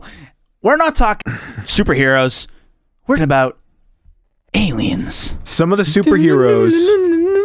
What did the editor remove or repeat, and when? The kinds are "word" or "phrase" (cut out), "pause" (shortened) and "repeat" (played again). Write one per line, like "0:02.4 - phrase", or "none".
0:01.2 - word
0:03.2 - word